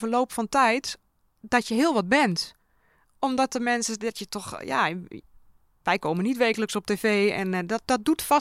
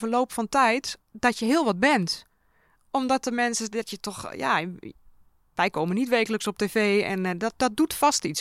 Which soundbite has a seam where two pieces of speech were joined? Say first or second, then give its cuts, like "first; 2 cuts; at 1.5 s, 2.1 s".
second; 1 cut; at 1.0 s